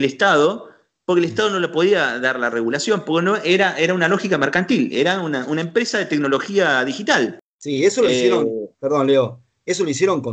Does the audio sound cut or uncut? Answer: uncut